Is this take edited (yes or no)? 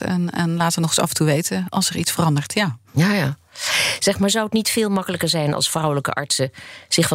no